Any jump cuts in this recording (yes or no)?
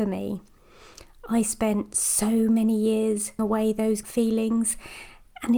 yes